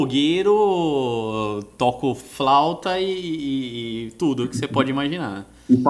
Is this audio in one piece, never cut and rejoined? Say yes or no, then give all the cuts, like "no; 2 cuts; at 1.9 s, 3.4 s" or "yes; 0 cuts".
yes; 0 cuts